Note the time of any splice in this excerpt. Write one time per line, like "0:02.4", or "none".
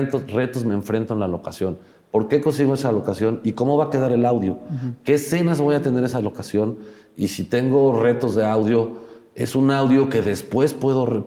none